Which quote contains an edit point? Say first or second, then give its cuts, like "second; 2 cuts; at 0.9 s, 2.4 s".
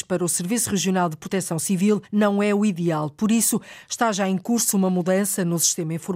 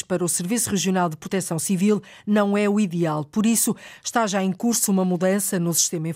first; 1 cut; at 2.0 s